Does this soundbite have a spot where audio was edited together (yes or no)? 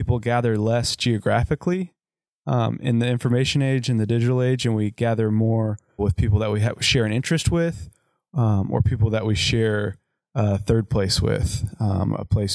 yes